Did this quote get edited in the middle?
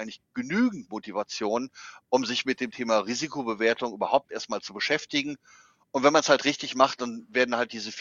no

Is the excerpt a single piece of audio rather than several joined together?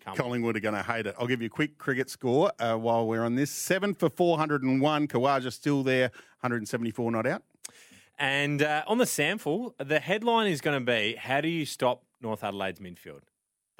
yes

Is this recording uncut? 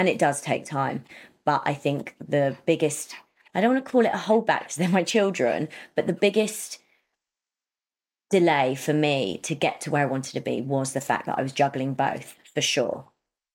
yes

